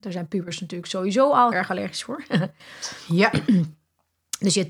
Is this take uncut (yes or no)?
no